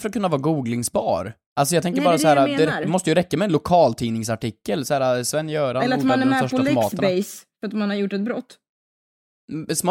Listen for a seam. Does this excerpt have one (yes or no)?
no